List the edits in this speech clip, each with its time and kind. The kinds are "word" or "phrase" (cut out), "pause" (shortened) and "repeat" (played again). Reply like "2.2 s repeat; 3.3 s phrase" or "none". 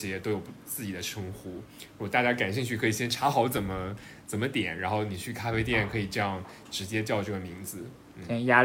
none